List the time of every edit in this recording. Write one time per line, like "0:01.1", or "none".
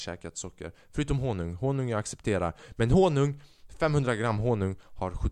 none